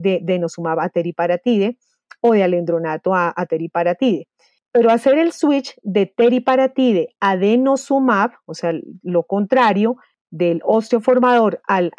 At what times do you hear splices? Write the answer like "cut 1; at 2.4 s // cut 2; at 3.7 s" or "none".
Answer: none